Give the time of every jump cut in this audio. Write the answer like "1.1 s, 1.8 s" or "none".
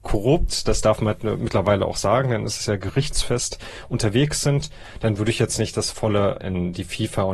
6.4 s